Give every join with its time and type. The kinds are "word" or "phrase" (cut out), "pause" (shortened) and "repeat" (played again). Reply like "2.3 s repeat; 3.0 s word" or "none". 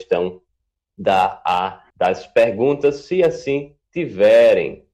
1.9 s pause